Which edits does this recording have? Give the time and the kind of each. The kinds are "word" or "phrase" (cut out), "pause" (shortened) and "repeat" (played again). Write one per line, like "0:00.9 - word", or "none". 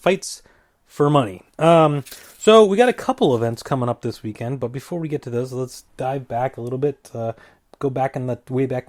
0:05.9 - pause